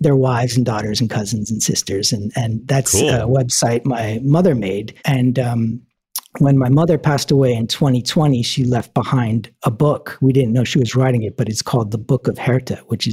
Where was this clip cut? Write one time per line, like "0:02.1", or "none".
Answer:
0:05.0

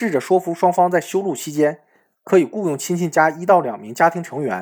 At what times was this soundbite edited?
none

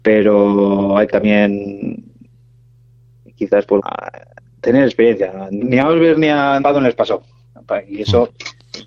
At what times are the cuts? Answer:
0:01.1
0:03.8
0:05.6
0:06.6

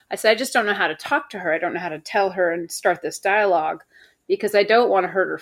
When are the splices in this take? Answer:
none

